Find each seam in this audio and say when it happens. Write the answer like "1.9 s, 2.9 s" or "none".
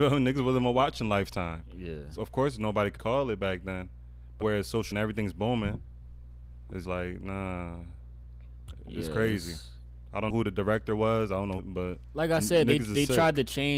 2.2 s, 3.0 s, 4.4 s, 4.9 s, 6.8 s, 10.3 s, 11.6 s